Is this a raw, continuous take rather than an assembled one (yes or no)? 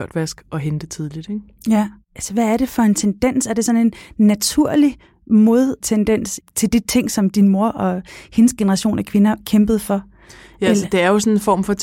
yes